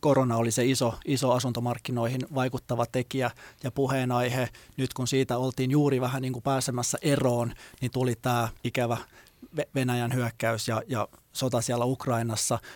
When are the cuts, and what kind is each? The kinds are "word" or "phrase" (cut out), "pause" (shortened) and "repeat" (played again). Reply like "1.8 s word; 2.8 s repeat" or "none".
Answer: 8.6 s pause